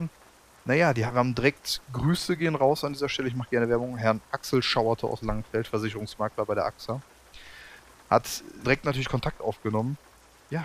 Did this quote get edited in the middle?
yes; 1 cut; at 8.6 s

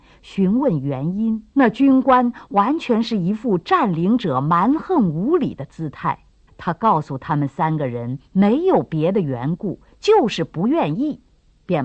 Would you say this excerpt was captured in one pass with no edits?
no; 2 cuts; at 1.5 s, 6.5 s

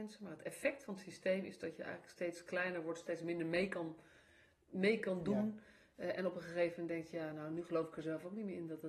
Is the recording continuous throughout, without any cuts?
yes; 0 cuts

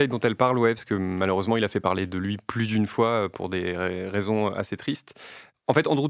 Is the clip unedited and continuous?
yes; 0 cuts

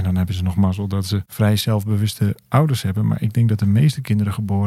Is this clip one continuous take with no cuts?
yes; 0 cuts

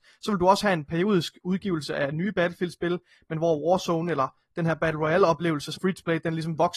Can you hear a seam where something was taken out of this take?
yes; 1 cut; at 5.8 s

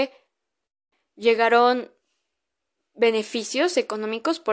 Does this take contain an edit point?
no; 0 cuts

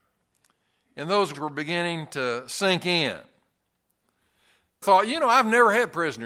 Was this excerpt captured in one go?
no; 2 cuts; at 1.3 s, 4.8 s

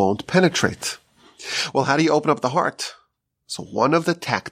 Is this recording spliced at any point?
no; 0 cuts

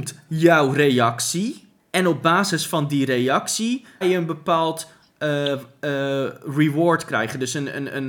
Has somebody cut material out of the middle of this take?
yes; 1 cut; at 4.0 s

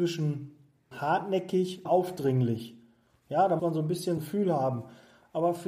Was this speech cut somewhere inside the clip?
yes; 4 cuts; at 0.9 s, 1.9 s, 3.6 s, 4.2 s

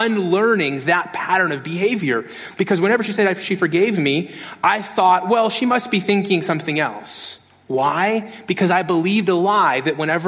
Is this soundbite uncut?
yes; 0 cuts

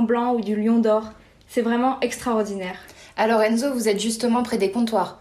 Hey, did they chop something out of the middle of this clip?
no; 0 cuts

